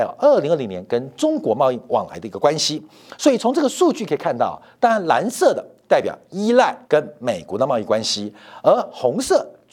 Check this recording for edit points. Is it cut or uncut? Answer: cut